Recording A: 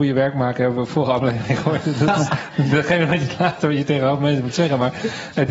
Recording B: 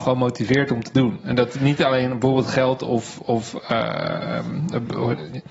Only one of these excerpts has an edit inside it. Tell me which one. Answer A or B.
A